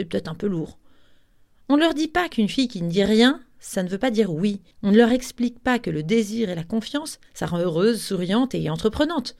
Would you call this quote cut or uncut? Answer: cut